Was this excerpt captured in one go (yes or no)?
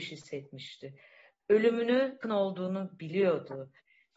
no